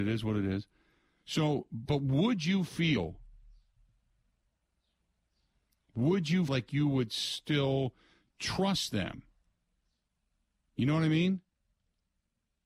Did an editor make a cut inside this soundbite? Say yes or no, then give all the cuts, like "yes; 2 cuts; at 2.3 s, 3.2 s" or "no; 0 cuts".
yes; 1 cut; at 6.5 s